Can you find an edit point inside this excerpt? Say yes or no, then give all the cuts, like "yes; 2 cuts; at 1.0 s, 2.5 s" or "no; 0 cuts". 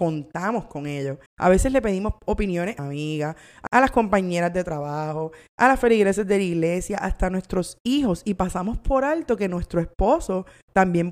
yes; 3 cuts; at 1.3 s, 2.8 s, 3.7 s